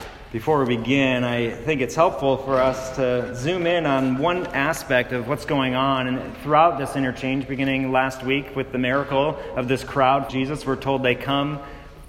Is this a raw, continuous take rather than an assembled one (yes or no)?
no